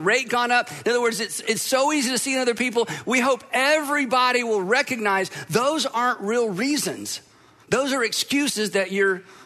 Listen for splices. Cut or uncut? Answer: uncut